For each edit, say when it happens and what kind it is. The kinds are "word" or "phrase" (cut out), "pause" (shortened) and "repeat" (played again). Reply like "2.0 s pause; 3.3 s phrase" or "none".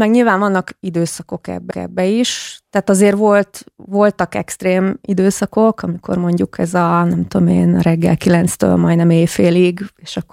1.7 s repeat

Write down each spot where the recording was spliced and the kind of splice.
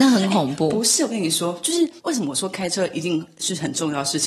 2.0 s pause

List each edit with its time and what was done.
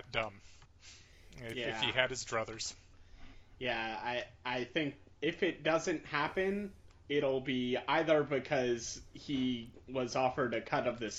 none

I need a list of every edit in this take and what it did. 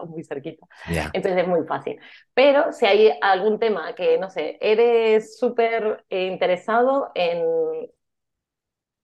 none

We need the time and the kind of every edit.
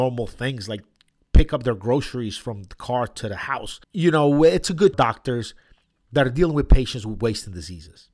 3.8 s pause; 4.9 s phrase

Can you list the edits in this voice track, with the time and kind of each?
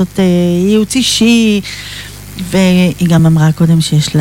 none

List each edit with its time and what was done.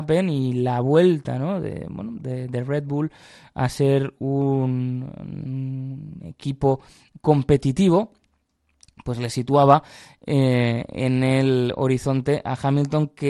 none

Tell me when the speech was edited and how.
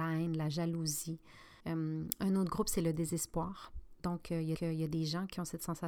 1.6 s pause; 4.5 s repeat

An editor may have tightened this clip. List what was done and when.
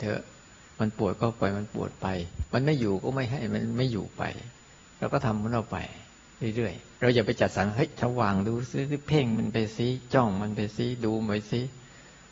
none

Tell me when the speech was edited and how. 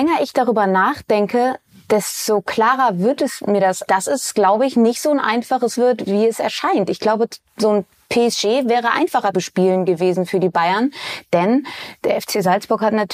3.9 s word; 5.8 s word; 9.3 s word

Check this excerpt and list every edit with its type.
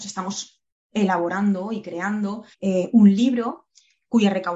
2.5 s pause

